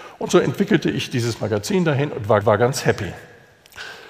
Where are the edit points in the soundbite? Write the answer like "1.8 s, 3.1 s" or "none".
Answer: 2.4 s